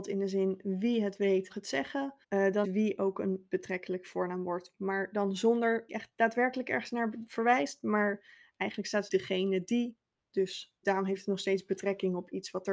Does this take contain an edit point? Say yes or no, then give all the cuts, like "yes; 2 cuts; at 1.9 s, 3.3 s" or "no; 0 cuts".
yes; 6 cuts; at 1.5 s, 2.2 s, 2.6 s, 5.9 s, 9.1 s, 10.8 s